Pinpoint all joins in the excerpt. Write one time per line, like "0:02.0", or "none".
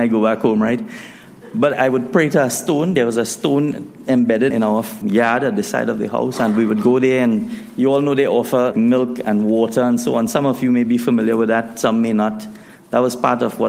0:01.7
0:04.5
0:05.0
0:08.7